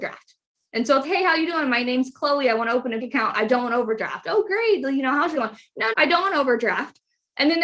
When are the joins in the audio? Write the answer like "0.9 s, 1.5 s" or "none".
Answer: 1.0 s, 3.0 s, 5.4 s, 5.9 s

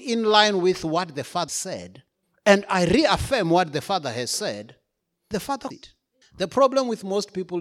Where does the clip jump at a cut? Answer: 1.5 s, 2.2 s, 5.3 s, 5.7 s, 6.2 s

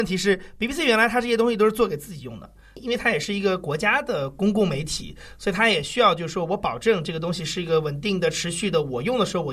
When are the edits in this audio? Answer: none

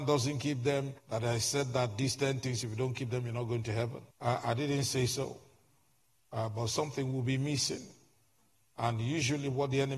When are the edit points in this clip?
1.0 s, 4.1 s

